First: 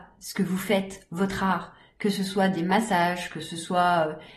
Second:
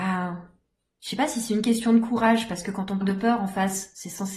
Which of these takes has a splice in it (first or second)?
second